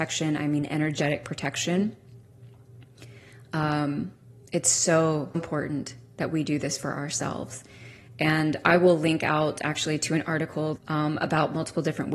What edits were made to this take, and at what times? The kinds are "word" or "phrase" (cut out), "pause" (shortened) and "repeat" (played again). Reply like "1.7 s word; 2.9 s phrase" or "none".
4.4 s pause; 5.3 s word; 10.8 s phrase